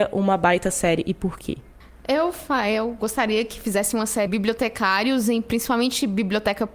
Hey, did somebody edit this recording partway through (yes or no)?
yes